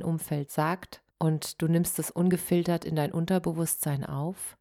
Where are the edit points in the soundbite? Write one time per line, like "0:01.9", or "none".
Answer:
0:01.1